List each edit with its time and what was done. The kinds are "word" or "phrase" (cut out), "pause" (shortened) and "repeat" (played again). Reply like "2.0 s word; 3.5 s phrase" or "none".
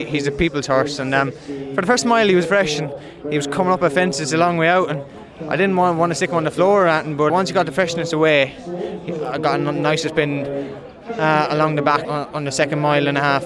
2.4 s word; 7.3 s word; 12.0 s word